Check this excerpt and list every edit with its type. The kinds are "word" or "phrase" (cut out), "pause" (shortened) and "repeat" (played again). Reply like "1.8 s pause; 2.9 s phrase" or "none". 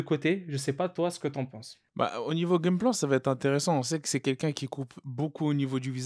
none